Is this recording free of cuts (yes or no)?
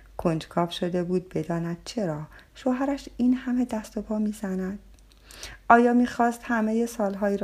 yes